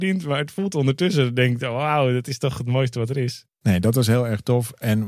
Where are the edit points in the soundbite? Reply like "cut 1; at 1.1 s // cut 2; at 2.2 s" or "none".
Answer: cut 1; at 3.5 s